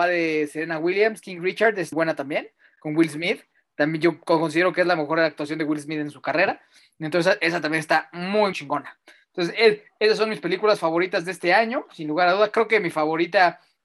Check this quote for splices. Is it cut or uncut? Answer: cut